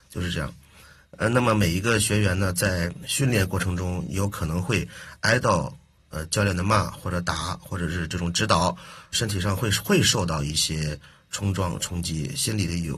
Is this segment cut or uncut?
cut